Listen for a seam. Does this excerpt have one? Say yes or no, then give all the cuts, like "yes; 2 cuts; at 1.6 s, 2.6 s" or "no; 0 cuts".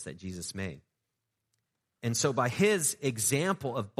no; 0 cuts